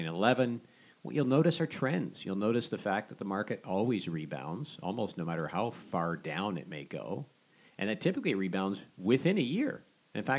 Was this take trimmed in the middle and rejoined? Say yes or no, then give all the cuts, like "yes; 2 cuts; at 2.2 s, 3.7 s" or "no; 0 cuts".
no; 0 cuts